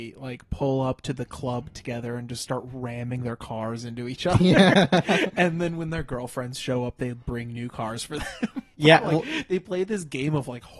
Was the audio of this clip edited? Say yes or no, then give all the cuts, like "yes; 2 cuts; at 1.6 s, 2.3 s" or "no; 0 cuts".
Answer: no; 0 cuts